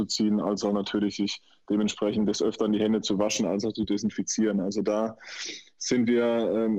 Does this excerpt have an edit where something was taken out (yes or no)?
no